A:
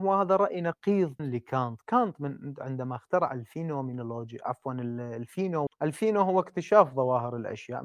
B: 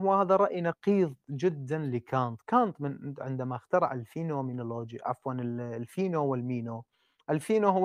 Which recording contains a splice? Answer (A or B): A